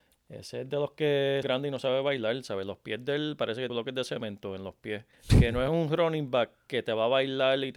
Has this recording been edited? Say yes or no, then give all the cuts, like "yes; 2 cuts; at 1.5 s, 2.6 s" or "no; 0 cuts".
yes; 4 cuts; at 1.4 s, 3.7 s, 5.1 s, 5.7 s